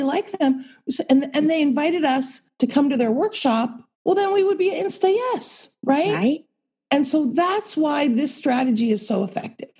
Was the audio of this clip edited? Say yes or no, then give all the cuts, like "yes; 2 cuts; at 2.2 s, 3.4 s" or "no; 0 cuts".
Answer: yes; 3 cuts; at 2.5 s, 3.9 s, 5.8 s